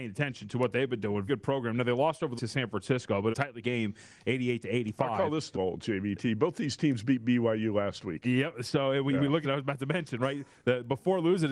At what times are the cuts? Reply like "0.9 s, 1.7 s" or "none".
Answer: 1.3 s, 2.4 s, 3.3 s, 3.6 s, 5.5 s, 9.4 s